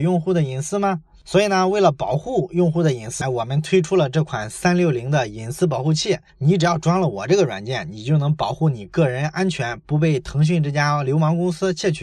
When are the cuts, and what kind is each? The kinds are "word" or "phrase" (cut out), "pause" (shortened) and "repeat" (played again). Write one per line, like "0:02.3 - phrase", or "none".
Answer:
0:03.2 - word